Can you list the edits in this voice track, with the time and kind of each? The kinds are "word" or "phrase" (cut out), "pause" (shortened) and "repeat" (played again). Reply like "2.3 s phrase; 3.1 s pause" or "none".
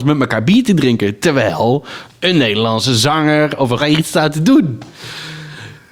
3.8 s word